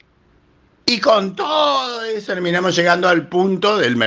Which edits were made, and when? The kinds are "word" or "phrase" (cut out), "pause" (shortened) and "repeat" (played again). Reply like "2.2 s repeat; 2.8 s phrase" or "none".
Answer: 2.3 s word